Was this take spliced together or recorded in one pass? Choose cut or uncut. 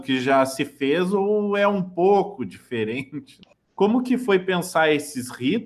uncut